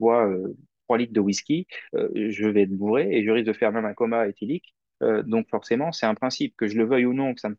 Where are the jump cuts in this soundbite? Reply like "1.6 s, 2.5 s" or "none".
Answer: none